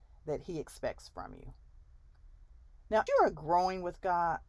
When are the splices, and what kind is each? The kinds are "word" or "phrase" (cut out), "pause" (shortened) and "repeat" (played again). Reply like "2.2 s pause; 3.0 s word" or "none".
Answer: 3.1 s word